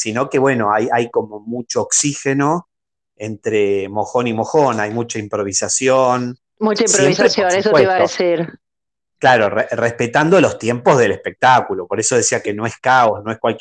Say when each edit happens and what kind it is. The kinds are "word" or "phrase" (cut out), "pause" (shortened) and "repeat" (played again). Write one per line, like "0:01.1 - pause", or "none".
none